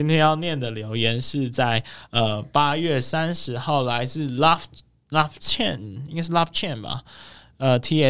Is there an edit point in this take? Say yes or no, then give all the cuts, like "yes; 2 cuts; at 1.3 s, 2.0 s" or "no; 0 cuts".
no; 0 cuts